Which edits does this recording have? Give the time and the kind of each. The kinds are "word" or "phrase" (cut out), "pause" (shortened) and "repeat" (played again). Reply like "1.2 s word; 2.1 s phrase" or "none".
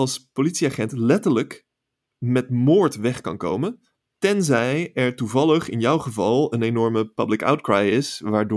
none